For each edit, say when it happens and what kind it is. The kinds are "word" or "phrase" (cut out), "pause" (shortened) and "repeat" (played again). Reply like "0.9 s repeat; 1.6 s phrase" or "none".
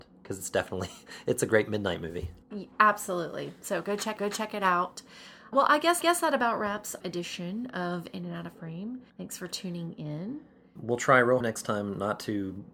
2.4 s pause; 4.2 s repeat; 5.5 s word; 6.0 s repeat; 7.0 s phrase; 9.1 s pause; 10.8 s word; 11.4 s word